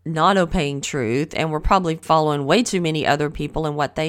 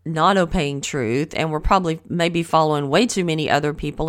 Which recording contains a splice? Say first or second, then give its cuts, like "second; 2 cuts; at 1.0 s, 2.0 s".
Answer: first; 1 cut; at 2.0 s